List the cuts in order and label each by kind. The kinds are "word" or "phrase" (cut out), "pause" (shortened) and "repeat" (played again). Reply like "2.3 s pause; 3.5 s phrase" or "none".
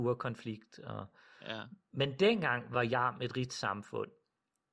none